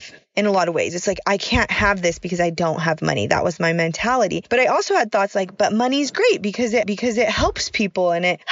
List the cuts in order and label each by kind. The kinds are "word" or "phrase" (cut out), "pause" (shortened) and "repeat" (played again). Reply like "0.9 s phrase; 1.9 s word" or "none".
6.8 s repeat